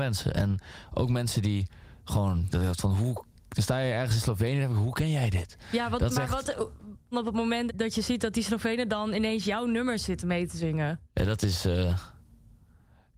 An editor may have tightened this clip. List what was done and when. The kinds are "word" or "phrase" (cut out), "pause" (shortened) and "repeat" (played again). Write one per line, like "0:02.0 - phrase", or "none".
0:02.5 - phrase
0:07.1 - phrase
0:07.7 - word

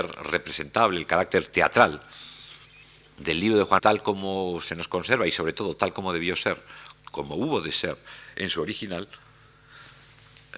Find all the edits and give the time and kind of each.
0:03.8 - word

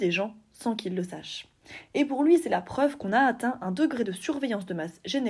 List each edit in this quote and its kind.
none

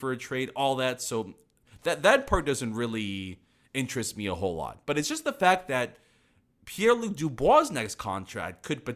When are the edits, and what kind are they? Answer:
none

